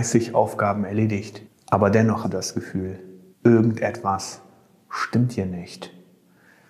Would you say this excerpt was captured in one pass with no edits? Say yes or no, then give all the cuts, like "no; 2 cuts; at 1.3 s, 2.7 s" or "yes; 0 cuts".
no; 3 cuts; at 1.4 s, 2.2 s, 3.3 s